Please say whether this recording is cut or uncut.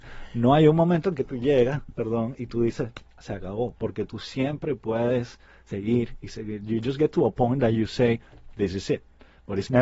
uncut